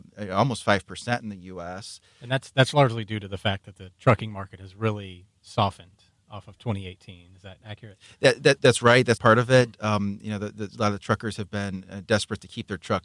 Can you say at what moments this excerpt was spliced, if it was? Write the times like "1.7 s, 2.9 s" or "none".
8.6 s, 9.2 s